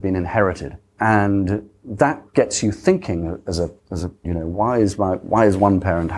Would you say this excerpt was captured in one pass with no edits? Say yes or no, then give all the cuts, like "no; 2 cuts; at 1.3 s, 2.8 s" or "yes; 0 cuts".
no; 3 cuts; at 2.3 s, 3.8 s, 4.2 s